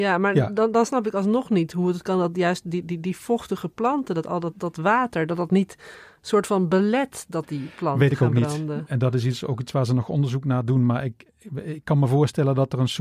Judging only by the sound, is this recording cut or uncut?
uncut